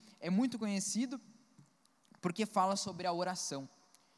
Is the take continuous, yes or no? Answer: yes